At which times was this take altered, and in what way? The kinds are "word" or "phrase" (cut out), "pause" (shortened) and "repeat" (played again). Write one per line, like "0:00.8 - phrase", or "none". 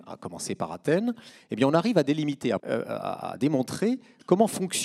0:02.6 - word